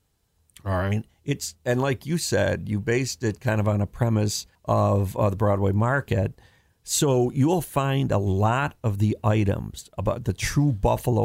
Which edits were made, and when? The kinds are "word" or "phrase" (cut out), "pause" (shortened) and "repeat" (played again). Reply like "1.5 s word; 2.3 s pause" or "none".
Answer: 4.5 s pause